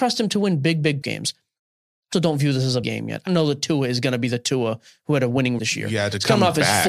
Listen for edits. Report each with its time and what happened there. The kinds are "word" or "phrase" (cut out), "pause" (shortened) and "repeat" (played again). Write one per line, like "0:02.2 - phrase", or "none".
0:01.0 - word
0:02.1 - word
0:02.8 - word
0:03.3 - word
0:05.6 - word

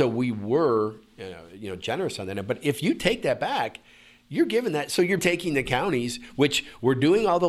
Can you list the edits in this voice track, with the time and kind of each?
0:05.2 - word

